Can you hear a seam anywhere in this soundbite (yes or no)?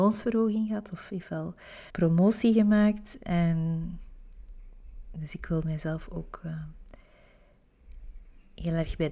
yes